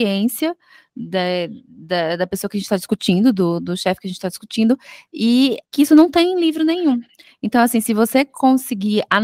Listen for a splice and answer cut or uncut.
cut